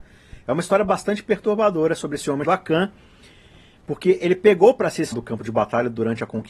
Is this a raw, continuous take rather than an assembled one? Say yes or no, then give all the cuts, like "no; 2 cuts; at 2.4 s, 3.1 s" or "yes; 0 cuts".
no; 2 cuts; at 2.4 s, 5.1 s